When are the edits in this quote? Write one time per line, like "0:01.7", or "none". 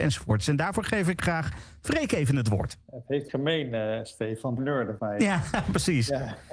0:02.8
0:03.3
0:04.6
0:05.0